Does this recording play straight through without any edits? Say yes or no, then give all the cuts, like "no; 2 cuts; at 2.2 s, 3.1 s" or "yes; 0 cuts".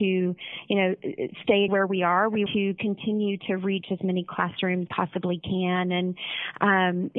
no; 3 cuts; at 1.7 s, 2.5 s, 4.9 s